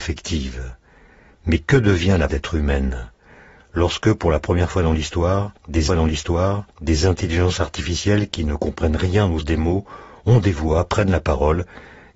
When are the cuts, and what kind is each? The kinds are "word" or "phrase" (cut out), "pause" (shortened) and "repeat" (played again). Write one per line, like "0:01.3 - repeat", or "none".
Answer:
0:02.3 - phrase
0:05.9 - repeat
0:09.4 - word